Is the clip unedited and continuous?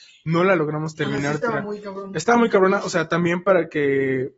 yes; 0 cuts

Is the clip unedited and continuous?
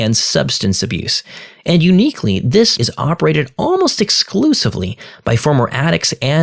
no; 1 cut; at 2.8 s

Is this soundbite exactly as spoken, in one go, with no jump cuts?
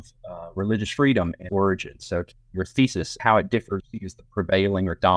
no; 4 cuts; at 1.5 s, 2.3 s, 3.2 s, 3.8 s

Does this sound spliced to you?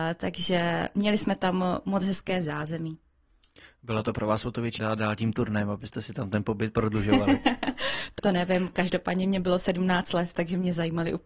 yes; 2 cuts; at 4.8 s, 8.2 s

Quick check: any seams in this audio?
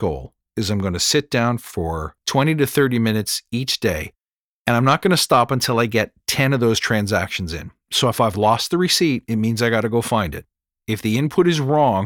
no; 0 cuts

